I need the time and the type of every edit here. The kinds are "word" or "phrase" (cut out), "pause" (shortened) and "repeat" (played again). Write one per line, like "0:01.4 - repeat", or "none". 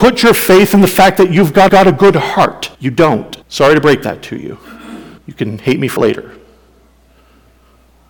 0:01.7 - repeat
0:02.7 - pause
0:03.4 - pause
0:05.2 - pause
0:06.0 - word